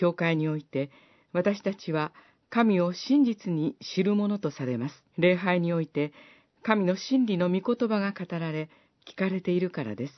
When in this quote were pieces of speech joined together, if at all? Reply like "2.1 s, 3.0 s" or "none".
5.1 s